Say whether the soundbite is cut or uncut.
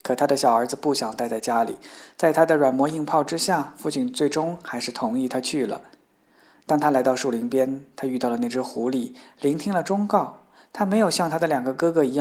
uncut